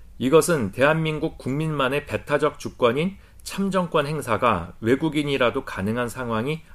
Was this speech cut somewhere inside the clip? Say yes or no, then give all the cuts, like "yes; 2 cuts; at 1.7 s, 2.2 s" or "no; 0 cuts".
no; 0 cuts